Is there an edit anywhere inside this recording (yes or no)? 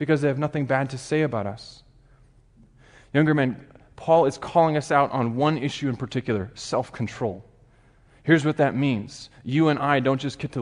no